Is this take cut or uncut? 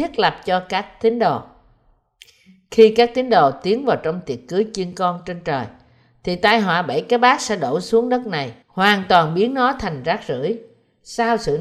cut